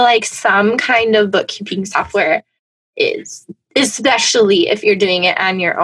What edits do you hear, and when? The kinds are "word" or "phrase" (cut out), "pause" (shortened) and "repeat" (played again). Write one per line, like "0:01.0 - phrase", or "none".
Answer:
none